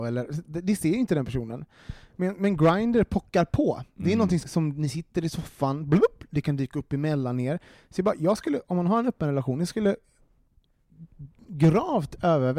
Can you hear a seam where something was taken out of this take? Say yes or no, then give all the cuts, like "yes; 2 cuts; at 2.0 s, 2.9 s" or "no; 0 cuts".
yes; 1 cut; at 4.4 s